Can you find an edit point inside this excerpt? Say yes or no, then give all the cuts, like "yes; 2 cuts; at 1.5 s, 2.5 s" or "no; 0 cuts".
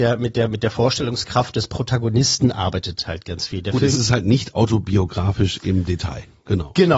no; 0 cuts